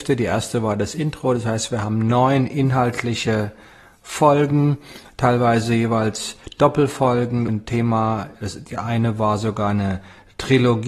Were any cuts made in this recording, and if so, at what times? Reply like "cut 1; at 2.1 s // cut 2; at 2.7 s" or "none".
cut 1; at 7.5 s